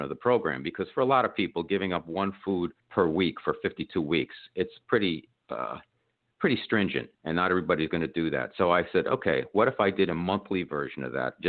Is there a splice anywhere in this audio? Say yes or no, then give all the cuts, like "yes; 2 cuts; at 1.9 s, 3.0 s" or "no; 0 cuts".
yes; 2 cuts; at 2.8 s, 7.1 s